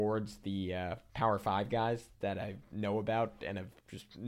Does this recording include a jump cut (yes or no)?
no